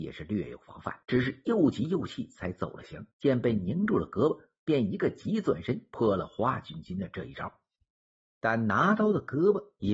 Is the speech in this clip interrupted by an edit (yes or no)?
yes